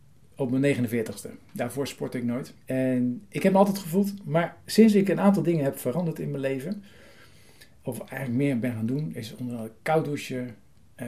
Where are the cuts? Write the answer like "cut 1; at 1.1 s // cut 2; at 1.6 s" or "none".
cut 1; at 2.6 s // cut 2; at 3.8 s